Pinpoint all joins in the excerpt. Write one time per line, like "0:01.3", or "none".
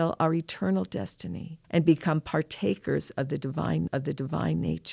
0:01.6
0:03.9